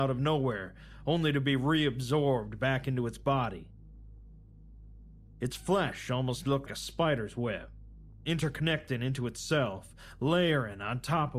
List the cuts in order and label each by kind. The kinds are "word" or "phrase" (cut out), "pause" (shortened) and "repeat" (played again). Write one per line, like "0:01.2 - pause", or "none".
0:06.7 - word